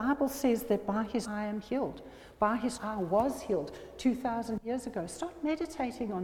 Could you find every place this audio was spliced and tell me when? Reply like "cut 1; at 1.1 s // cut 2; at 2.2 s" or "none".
cut 1; at 1.2 s // cut 2; at 2.8 s